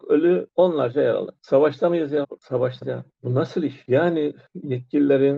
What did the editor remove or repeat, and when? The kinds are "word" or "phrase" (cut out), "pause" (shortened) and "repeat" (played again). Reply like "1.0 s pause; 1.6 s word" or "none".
2.2 s word; 2.8 s word